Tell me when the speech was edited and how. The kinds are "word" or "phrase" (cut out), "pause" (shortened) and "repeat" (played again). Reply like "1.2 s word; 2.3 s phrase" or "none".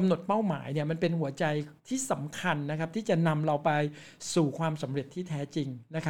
1.8 s pause